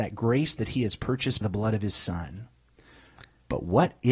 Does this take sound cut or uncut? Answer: cut